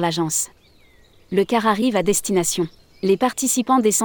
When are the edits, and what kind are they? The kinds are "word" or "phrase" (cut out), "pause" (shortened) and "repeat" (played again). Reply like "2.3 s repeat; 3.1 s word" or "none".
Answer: 2.8 s pause

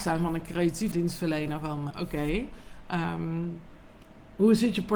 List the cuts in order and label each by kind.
0.9 s word; 1.9 s word

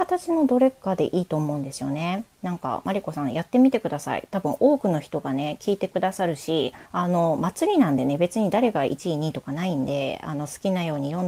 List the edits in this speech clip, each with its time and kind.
2.3 s pause; 6.8 s pause

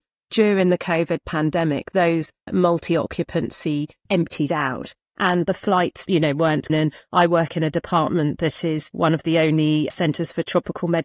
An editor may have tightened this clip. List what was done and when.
4.1 s word; 6.7 s phrase

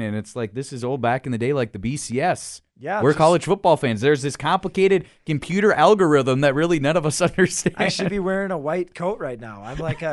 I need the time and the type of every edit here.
2.7 s pause

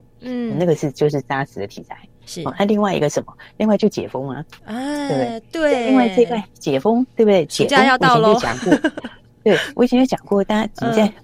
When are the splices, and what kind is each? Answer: 4.6 s pause

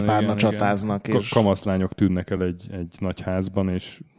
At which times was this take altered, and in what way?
none

